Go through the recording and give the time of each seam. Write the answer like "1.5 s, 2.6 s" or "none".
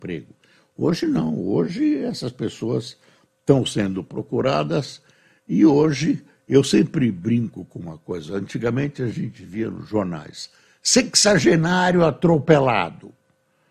none